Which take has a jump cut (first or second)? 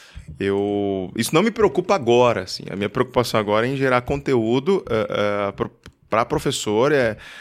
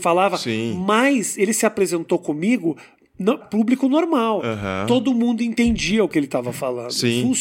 second